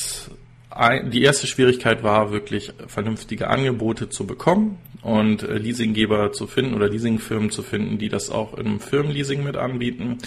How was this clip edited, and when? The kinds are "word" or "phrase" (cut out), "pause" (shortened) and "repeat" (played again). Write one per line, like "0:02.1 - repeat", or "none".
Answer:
none